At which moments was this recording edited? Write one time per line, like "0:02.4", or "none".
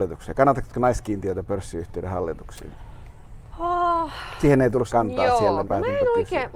0:04.9
0:05.6